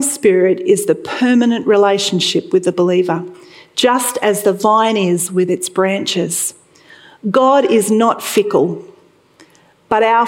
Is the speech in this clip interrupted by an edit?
no; 0 cuts

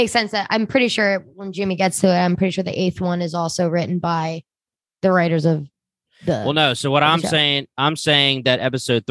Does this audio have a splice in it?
no; 0 cuts

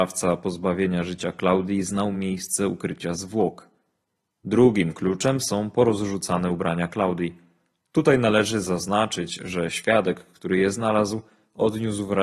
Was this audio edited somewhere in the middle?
no; 0 cuts

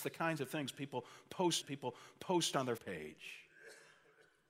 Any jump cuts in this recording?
yes; 2 cuts; at 1.6 s, 2.8 s

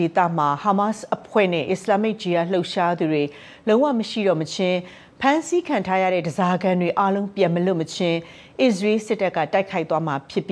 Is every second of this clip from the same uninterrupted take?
yes; 0 cuts

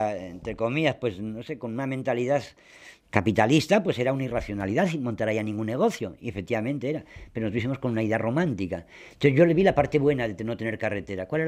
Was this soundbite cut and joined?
no; 0 cuts

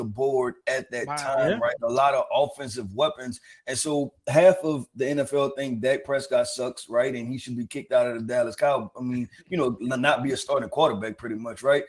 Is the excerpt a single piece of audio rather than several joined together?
yes; 0 cuts

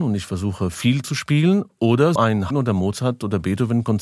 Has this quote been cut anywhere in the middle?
yes; 3 cuts; at 1.0 s, 2.2 s, 2.5 s

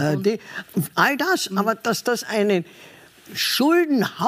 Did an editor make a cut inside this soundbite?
no; 0 cuts

